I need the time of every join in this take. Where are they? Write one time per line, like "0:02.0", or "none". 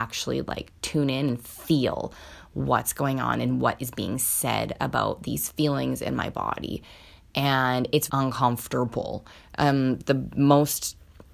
0:08.1

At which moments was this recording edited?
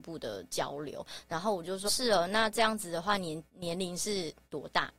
0:01.9

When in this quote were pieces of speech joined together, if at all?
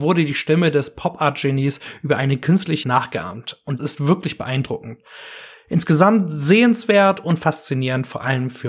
0:02.8
0:03.8

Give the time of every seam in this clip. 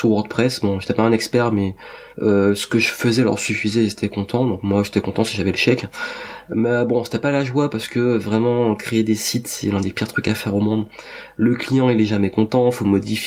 0:02.1

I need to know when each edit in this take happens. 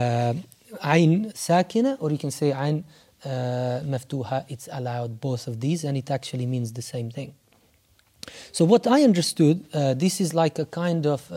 0:01.3

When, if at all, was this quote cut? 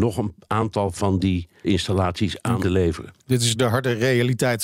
0:01.6
0:02.6
0:03.2
0:03.5

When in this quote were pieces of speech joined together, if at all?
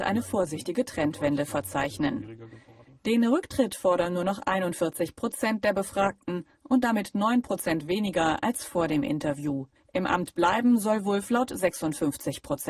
0:09.8

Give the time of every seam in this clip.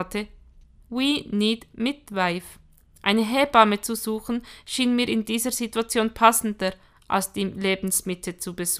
none

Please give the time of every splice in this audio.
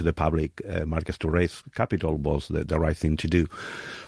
none

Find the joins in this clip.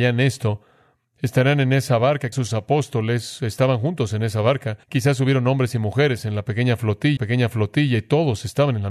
0:02.3
0:04.8
0:07.2

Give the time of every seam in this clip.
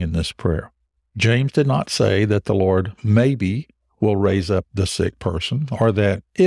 none

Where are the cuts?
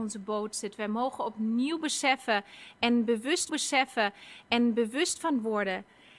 0:03.5

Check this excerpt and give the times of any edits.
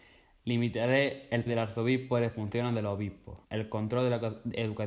0:01.5
0:03.4

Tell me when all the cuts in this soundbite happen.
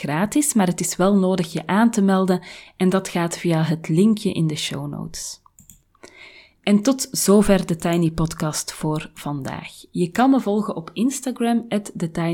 none

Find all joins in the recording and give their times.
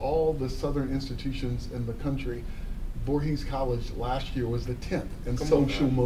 0:04.6

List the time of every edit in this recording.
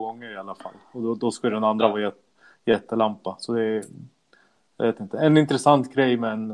none

